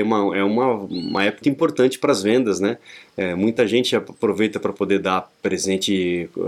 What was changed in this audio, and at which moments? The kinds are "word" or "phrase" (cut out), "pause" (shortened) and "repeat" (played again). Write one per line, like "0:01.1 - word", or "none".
0:01.4 - word